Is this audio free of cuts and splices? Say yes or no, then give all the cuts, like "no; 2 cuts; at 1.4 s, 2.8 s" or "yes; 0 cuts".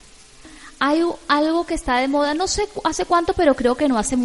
yes; 0 cuts